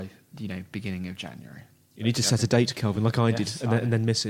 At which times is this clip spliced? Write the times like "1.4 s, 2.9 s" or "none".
none